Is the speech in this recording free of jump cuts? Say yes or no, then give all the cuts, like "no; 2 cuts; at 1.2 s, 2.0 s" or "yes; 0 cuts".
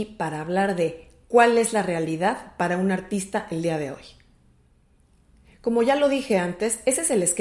yes; 0 cuts